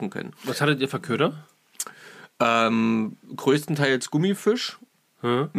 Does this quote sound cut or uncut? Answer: uncut